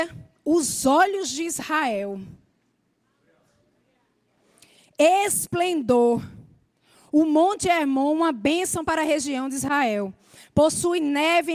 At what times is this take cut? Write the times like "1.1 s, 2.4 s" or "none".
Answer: none

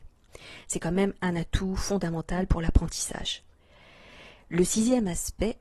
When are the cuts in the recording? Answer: none

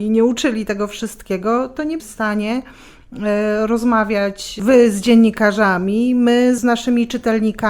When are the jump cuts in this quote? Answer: 2.0 s, 6.6 s

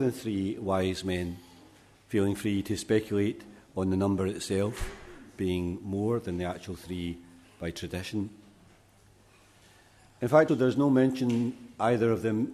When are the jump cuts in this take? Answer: 10.5 s

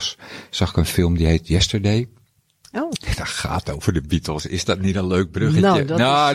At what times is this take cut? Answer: none

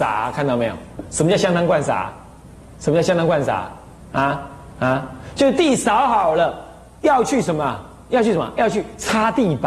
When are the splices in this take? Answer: none

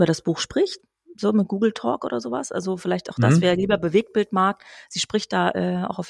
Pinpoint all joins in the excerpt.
none

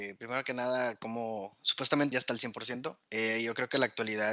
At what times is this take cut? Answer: 2.1 s, 3.0 s

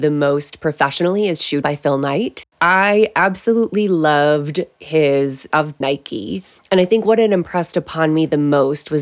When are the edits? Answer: 1.6 s, 5.5 s, 5.8 s

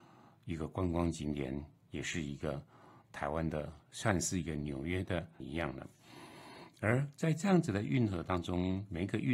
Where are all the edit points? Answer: 5.4 s

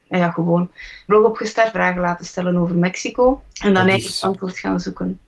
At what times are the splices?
1.1 s, 1.7 s, 3.5 s

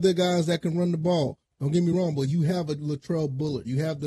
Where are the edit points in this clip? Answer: none

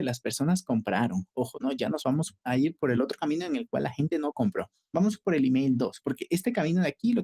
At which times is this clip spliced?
none

